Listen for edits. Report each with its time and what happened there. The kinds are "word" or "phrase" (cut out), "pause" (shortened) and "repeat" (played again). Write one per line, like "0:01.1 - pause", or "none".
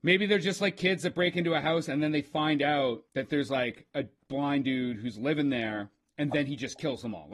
0:03.1 - pause
0:06.0 - pause